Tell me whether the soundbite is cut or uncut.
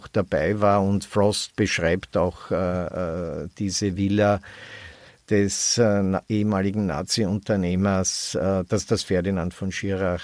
uncut